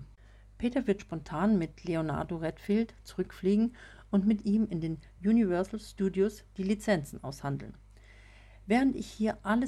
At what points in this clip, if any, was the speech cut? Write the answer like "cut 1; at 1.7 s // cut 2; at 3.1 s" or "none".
cut 1; at 1.0 s